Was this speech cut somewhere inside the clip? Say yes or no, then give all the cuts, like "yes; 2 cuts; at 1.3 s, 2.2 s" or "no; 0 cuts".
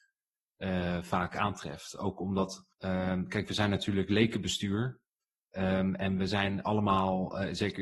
yes; 1 cut; at 2.7 s